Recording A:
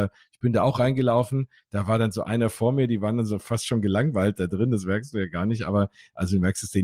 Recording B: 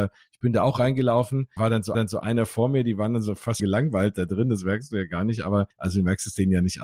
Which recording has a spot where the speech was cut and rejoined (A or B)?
B